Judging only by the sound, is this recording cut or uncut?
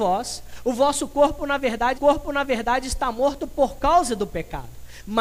cut